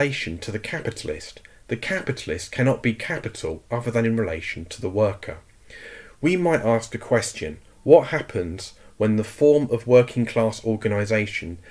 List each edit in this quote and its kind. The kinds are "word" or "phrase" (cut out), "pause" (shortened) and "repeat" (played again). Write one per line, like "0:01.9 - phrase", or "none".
none